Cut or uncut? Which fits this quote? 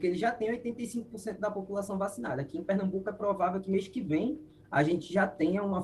uncut